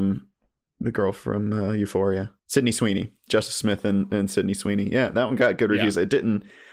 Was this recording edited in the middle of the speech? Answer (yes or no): yes